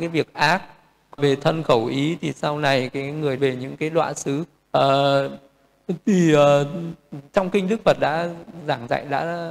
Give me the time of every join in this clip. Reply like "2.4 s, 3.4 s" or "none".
1.2 s, 3.4 s, 4.6 s